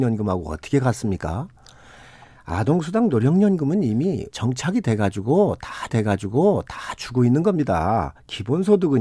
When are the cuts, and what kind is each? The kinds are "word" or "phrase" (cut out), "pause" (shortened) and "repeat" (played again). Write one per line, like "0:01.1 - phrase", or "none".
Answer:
0:04.3 - word
0:05.9 - repeat